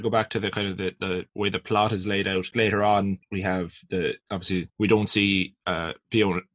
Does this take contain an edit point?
yes; 1 cut; at 2.5 s

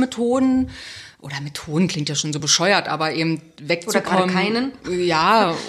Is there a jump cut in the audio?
no; 0 cuts

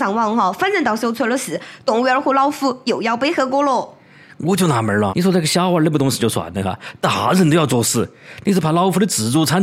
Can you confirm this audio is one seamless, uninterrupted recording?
no; 1 cut; at 5.1 s

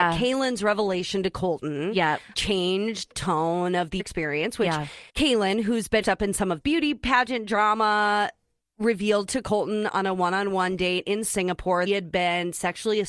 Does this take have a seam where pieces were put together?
yes; 8 cuts; at 2.3 s, 3.1 s, 4.0 s, 5.1 s, 6.0 s, 6.6 s, 8.6 s, 11.9 s

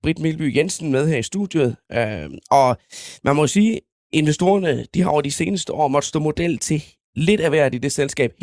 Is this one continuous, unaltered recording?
yes; 0 cuts

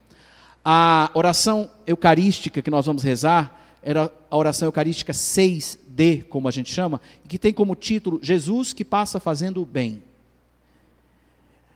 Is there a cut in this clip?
no; 0 cuts

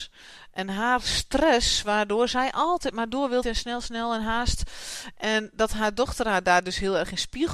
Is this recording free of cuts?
no; 1 cut; at 3.4 s

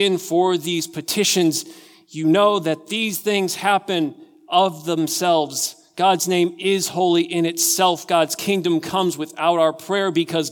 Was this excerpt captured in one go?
yes; 0 cuts

